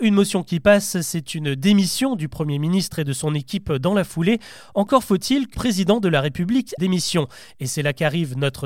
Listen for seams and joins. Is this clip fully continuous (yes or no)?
no